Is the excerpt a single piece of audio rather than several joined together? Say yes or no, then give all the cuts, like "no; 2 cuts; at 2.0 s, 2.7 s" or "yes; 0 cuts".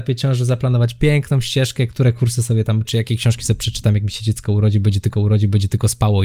no; 2 cuts; at 2.8 s, 5.1 s